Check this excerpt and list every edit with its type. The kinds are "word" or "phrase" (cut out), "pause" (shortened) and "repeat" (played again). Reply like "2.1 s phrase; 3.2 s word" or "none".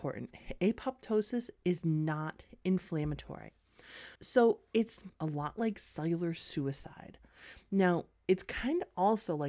4.2 s pause; 5.1 s pause

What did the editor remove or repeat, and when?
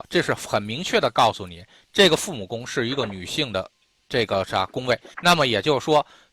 5.1 s pause

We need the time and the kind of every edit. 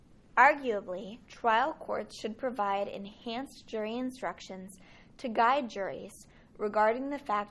1.3 s pause

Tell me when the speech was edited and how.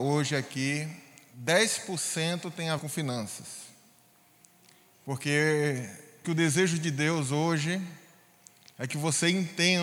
2.8 s word; 6.2 s word

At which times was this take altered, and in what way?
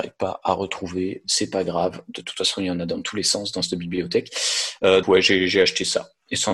5.0 s word

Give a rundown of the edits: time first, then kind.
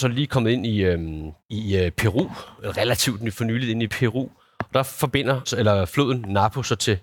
1.4 s pause; 3.9 s word; 5.5 s word

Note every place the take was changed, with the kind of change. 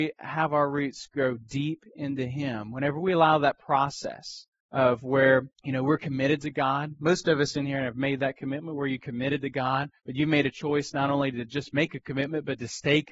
4.6 s pause; 5.5 s pause; 10.0 s pause

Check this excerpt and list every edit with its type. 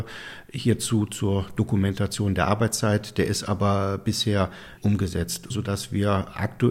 4.8 s word; 5.5 s word

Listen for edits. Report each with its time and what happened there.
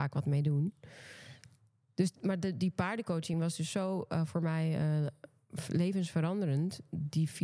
none

